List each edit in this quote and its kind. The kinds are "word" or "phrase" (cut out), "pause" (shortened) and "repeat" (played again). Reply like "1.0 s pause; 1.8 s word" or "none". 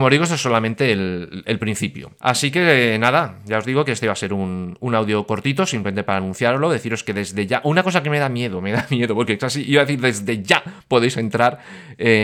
2.2 s pause